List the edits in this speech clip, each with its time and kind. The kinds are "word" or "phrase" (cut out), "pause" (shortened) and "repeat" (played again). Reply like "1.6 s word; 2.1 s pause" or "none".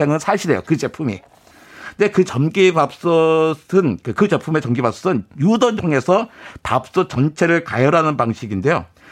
2.3 s word; 3.6 s pause; 5.8 s word